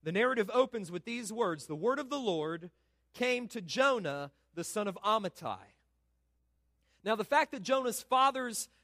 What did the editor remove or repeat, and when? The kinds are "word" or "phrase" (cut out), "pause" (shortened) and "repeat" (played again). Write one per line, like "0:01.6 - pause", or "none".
none